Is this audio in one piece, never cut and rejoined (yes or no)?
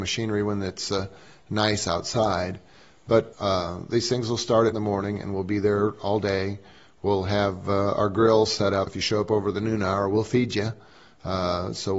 no